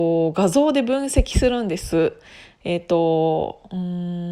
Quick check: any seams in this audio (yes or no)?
no